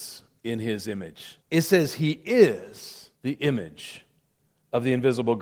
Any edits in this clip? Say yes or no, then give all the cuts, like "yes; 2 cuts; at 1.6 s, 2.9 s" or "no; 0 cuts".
yes; 2 cuts; at 1.4 s, 3.1 s